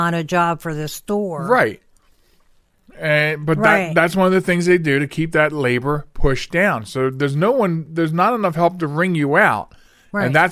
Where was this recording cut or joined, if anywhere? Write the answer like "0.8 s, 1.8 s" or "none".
none